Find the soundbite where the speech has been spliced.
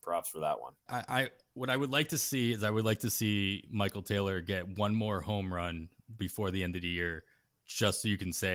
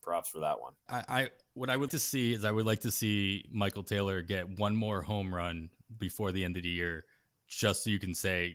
second; 1 cut; at 1.9 s

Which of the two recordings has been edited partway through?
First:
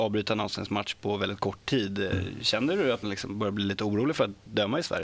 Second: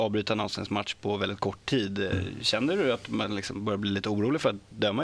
first; 1 cut; at 3.0 s

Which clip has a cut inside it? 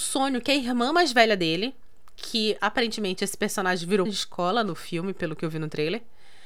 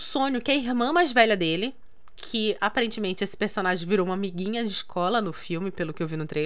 first; 1 cut; at 4.1 s

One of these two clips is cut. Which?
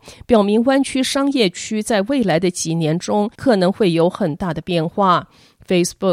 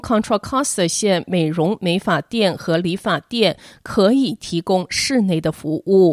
first; 1 cut; at 3.3 s

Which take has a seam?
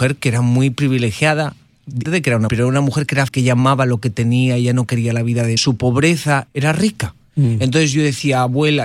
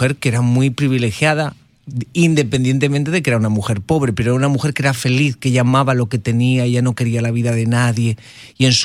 first; 5 cuts; at 2.0 s, 2.5 s, 3.3 s, 5.6 s, 6.5 s

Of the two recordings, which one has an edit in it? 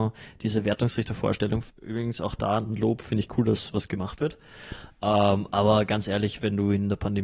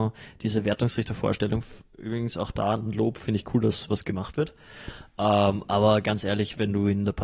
first; 1 cut; at 1.7 s

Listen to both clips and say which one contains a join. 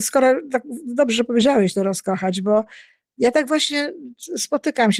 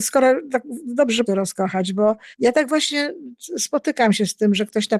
second; 2 cuts; at 1.3 s, 2.3 s

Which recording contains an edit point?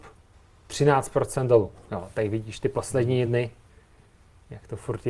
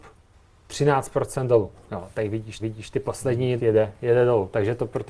second; 2 cuts; at 2.6 s, 3.6 s

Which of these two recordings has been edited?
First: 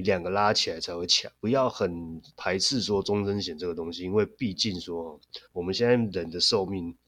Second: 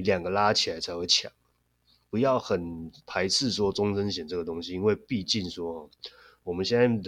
first; 2 cuts; at 1.4 s, 5.5 s

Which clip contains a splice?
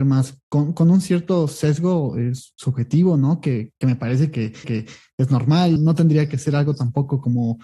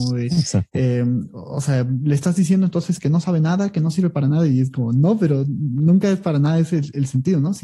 first; 3 cuts; at 3.8 s, 4.6 s, 5.8 s

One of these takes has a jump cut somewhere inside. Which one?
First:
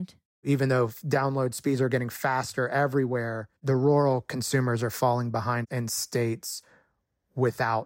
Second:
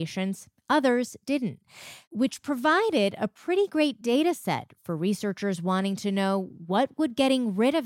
first; 1 cut; at 3.6 s

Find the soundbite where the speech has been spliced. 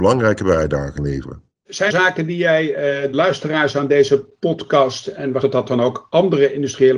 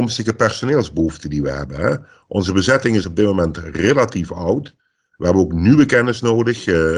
first; 4 cuts; at 1.0 s, 1.9 s, 3.1 s, 5.4 s

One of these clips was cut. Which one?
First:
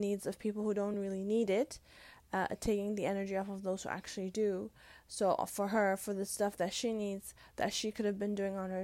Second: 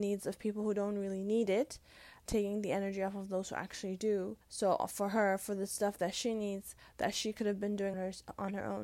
second; 3 cuts; at 2.3 s, 4.4 s, 7.9 s

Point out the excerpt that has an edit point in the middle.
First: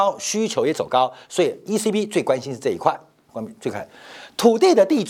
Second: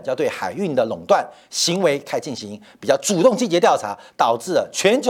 first; 1 cut; at 3.3 s

